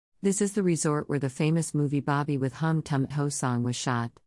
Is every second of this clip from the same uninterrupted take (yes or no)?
no